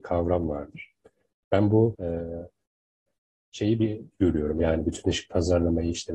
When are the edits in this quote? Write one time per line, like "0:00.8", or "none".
0:01.9
0:04.1